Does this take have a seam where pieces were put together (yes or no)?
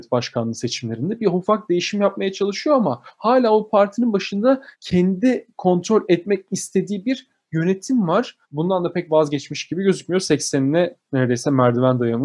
yes